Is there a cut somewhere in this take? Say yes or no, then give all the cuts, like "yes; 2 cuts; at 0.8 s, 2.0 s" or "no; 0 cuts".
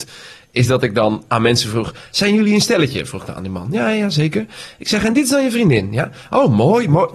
no; 0 cuts